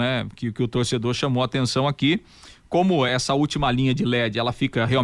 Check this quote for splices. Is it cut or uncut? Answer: uncut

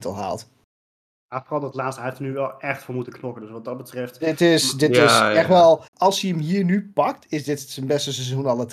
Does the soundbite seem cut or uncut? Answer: cut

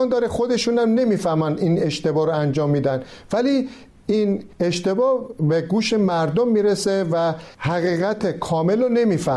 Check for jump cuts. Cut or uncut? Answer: cut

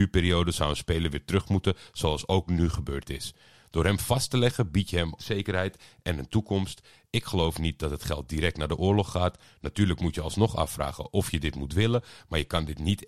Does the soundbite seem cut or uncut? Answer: cut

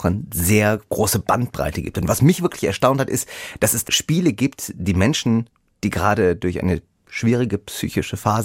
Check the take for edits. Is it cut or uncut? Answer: uncut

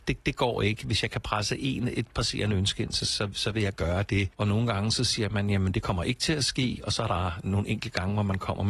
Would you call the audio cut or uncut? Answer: uncut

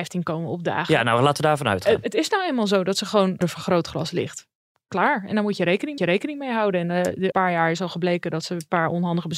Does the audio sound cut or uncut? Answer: cut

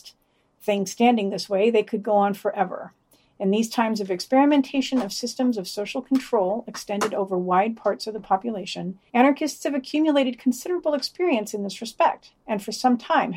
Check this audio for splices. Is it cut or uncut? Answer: cut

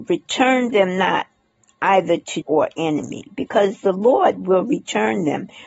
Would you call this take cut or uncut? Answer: cut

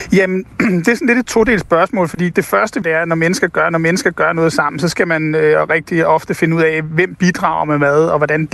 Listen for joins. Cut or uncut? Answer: cut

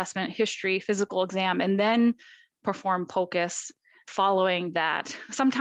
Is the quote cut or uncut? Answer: uncut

